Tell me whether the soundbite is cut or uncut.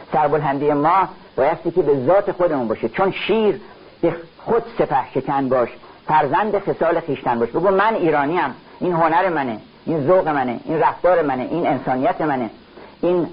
cut